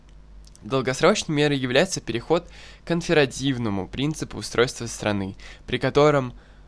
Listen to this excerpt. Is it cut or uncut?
uncut